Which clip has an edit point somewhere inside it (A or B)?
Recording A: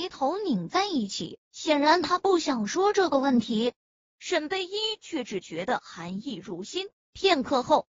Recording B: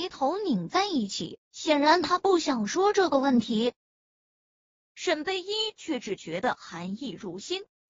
A